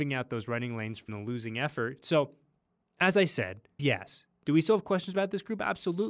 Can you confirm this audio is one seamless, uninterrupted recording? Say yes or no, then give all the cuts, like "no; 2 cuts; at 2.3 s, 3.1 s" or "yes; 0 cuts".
no; 3 cuts; at 1.1 s, 2.7 s, 3.8 s